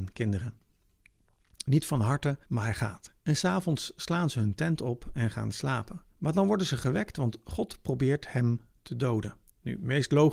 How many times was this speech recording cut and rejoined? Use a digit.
4